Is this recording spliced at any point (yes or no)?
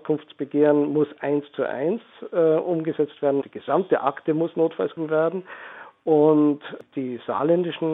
yes